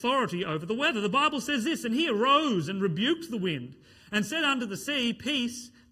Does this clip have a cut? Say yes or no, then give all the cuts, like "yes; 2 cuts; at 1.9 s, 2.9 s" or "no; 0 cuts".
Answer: no; 0 cuts